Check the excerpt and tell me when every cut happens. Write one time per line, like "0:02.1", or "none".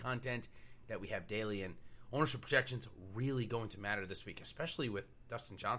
none